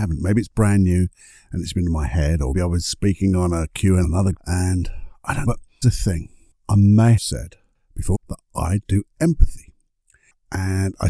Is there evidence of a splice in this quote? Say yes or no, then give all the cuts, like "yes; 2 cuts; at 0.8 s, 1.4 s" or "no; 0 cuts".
yes; 8 cuts; at 2.5 s, 4.0 s, 4.3 s, 5.4 s, 5.8 s, 7.2 s, 8.1 s, 8.8 s